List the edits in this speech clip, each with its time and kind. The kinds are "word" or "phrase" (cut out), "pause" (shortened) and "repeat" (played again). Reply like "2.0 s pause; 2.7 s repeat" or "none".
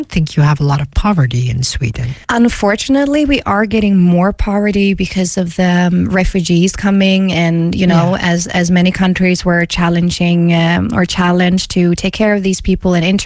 2.2 s pause